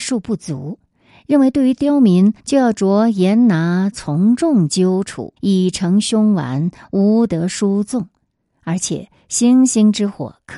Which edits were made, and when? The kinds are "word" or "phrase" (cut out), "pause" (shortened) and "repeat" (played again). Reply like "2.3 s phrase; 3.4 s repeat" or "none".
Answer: 2.4 s pause; 5.4 s pause

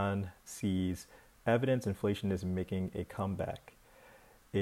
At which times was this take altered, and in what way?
none

